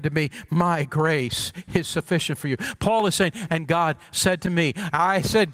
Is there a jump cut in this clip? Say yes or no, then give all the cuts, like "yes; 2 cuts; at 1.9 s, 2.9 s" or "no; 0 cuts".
no; 0 cuts